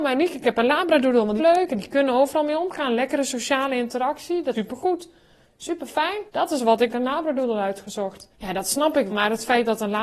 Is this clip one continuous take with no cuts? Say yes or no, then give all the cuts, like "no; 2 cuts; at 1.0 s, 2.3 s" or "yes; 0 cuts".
no; 6 cuts; at 1.4 s, 4.5 s, 6.3 s, 6.9 s, 8.3 s, 9.1 s